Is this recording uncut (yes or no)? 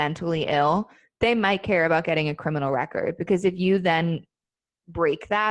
yes